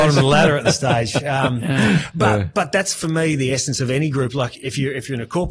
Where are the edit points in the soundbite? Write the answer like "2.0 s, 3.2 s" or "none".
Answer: none